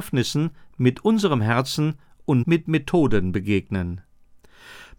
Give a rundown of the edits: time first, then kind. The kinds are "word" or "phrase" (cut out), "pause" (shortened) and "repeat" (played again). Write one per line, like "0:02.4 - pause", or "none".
0:02.4 - word